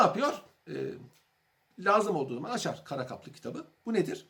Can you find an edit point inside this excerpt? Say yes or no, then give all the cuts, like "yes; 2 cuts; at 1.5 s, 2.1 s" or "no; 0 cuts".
no; 0 cuts